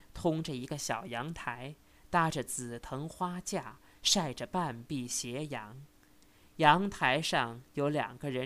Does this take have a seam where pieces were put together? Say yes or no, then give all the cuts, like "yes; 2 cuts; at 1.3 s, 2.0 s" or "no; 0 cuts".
no; 0 cuts